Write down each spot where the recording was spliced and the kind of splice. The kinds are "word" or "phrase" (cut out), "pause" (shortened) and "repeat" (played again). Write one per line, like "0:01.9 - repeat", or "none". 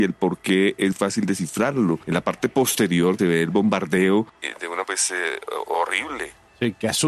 0:00.9 - word
0:03.2 - word
0:04.8 - word

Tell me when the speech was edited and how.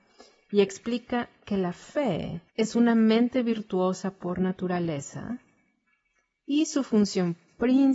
0:02.5 - pause

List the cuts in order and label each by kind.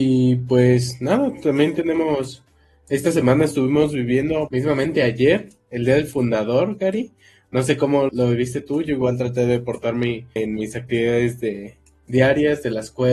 0:04.5 - word
0:08.1 - word
0:10.4 - word

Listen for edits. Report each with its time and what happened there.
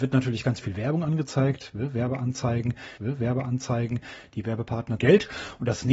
0:03.0 - repeat
0:05.0 - phrase

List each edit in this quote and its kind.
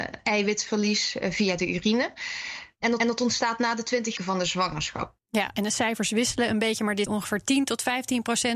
0:03.0 - repeat
0:04.2 - word
0:05.2 - pause
0:07.1 - phrase

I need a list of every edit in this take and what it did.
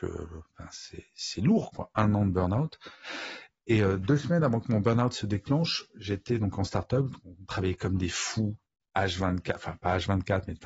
none

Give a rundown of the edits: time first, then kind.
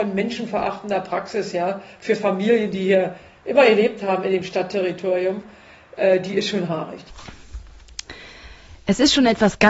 none

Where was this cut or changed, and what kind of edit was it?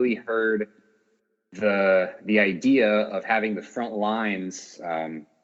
none

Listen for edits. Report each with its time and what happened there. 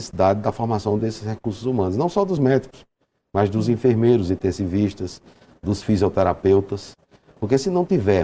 none

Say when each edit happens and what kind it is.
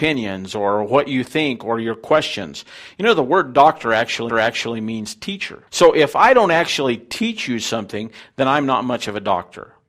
0:04.3 - repeat
0:05.7 - pause

